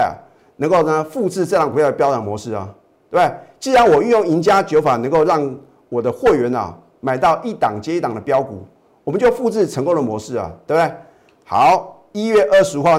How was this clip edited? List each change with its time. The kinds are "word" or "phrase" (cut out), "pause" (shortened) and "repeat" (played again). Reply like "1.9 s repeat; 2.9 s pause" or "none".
none